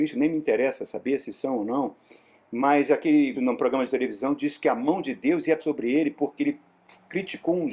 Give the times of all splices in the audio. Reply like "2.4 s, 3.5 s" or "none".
3.3 s, 5.6 s